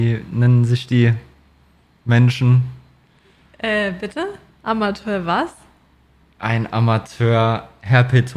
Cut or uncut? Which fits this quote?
uncut